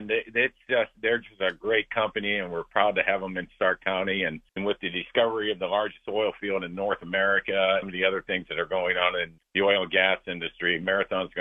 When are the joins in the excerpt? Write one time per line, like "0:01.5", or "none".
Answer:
0:00.9
0:04.5
0:07.8
0:09.4